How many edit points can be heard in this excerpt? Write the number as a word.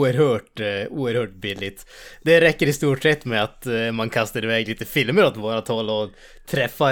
zero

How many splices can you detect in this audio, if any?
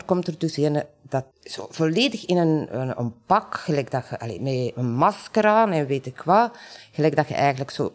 two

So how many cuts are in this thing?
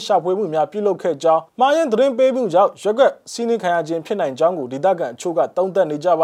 one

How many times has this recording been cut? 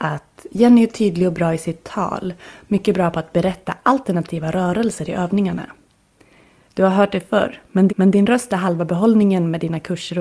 one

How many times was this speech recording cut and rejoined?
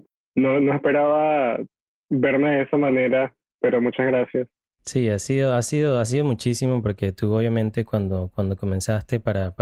zero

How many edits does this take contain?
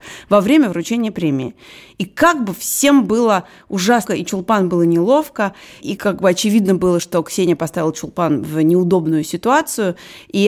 two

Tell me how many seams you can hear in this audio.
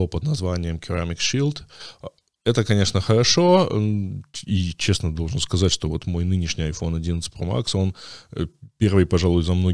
zero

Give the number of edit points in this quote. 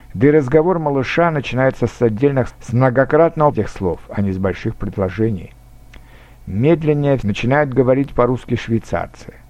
three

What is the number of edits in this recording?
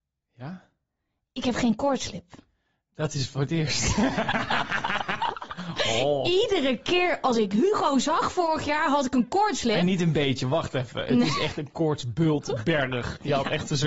zero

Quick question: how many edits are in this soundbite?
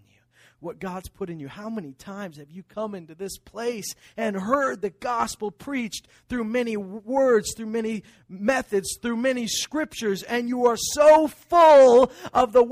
zero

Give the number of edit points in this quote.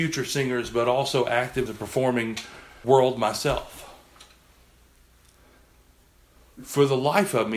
two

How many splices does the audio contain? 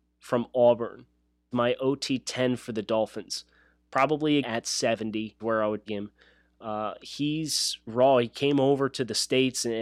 five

